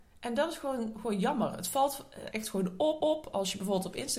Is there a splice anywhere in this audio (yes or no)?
yes